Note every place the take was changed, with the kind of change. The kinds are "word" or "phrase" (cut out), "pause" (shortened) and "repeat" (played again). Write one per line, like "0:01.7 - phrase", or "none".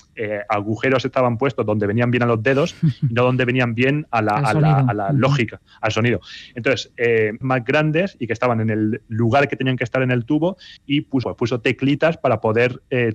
0:07.4 - phrase
0:10.8 - pause
0:11.2 - word